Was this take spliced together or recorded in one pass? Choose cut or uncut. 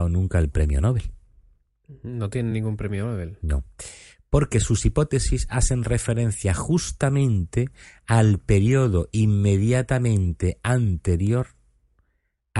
uncut